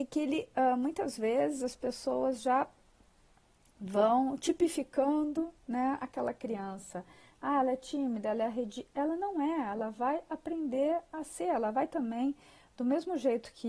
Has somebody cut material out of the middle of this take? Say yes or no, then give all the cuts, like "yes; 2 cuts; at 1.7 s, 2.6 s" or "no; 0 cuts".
no; 0 cuts